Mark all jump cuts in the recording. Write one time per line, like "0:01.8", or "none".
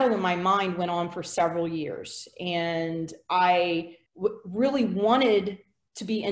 0:04.1

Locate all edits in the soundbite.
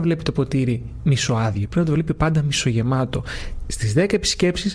none

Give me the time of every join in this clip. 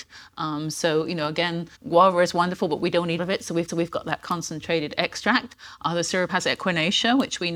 0:01.7
0:03.2
0:03.7
0:06.3

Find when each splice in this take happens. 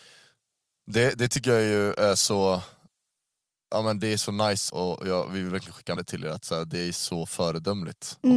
0:04.7
0:06.0

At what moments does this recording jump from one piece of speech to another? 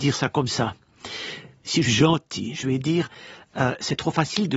0:01.8

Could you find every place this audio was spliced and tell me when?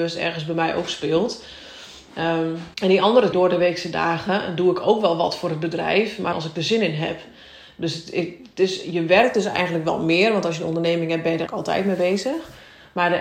0:02.7
0:03.3
0:06.3
0:11.5

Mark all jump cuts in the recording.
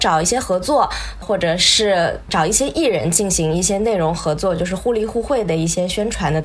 0:01.2

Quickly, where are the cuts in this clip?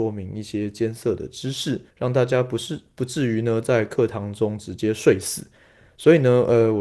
0:01.9

